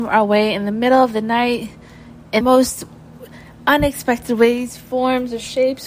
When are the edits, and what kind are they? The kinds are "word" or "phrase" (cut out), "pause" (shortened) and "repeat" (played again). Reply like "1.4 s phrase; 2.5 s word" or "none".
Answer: 2.4 s word